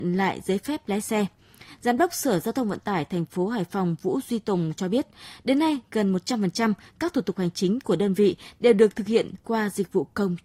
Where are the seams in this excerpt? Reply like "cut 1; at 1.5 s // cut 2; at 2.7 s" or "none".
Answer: none